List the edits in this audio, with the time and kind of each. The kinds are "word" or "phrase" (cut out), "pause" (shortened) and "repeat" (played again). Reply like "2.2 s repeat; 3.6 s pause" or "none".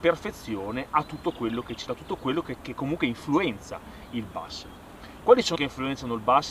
1.9 s word; 2.6 s word; 5.6 s phrase